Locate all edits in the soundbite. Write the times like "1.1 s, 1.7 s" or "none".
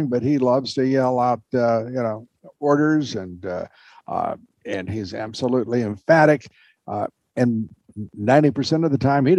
none